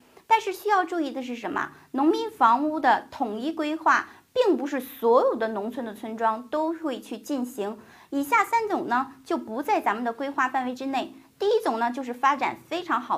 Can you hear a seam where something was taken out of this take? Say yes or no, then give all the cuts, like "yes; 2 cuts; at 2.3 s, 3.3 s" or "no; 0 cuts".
no; 0 cuts